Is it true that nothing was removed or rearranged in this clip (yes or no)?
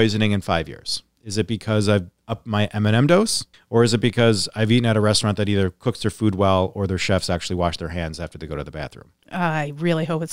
no